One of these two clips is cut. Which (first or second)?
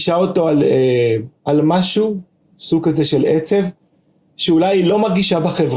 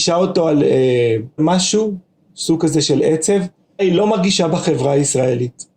second